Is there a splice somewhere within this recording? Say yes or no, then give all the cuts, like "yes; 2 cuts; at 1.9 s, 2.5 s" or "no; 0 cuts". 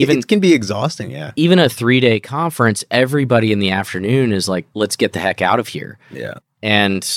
no; 0 cuts